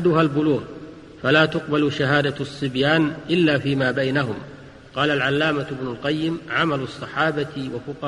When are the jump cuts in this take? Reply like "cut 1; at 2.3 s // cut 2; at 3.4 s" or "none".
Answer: none